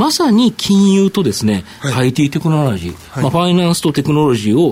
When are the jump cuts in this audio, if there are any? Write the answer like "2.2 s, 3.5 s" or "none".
none

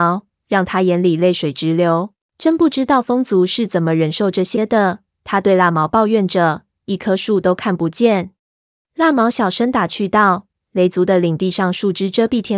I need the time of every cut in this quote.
2.3 s, 8.4 s

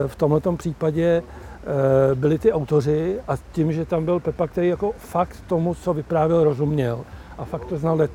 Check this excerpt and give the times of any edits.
3.2 s

